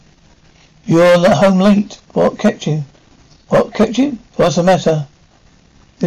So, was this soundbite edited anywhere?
no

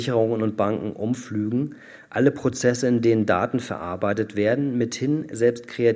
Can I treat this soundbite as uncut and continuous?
yes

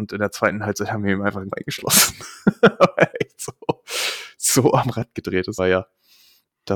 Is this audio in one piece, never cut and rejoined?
no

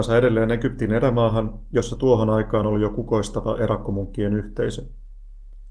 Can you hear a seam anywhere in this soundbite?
no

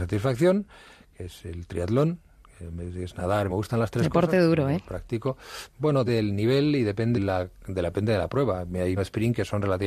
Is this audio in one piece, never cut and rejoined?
no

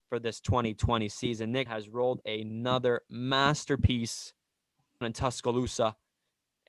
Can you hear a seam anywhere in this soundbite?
yes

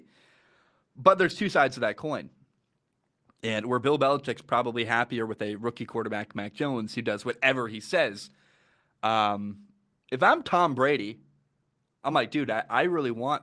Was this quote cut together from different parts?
no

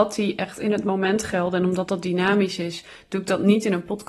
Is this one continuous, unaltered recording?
yes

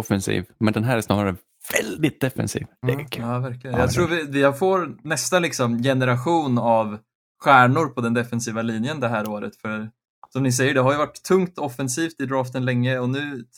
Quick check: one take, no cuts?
yes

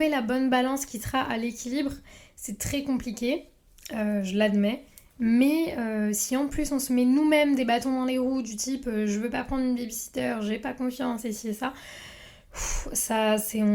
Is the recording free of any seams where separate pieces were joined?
yes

